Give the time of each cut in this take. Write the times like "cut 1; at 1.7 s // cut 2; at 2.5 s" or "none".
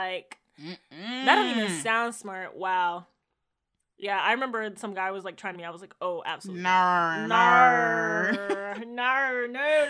cut 1; at 5.5 s